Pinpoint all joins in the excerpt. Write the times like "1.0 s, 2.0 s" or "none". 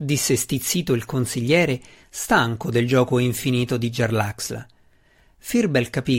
none